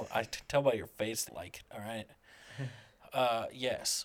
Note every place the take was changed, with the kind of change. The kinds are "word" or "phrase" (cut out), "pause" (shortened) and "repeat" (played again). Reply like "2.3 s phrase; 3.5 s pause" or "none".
1.3 s word; 1.6 s word